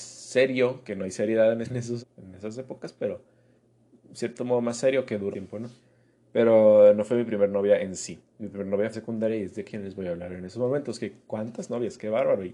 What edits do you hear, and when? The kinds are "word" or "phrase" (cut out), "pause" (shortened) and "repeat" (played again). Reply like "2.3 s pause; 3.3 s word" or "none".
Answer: 1.6 s word; 2.0 s word; 5.3 s word; 8.9 s phrase